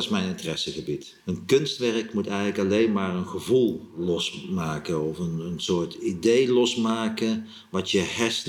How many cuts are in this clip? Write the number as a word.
one